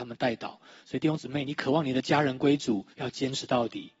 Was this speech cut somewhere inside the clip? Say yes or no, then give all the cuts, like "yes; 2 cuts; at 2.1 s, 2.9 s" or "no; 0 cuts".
yes; 1 cut; at 2.9 s